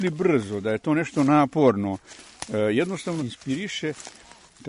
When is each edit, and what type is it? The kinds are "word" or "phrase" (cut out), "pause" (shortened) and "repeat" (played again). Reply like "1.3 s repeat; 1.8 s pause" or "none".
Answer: 3.2 s phrase